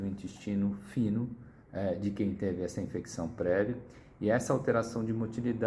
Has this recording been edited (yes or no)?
no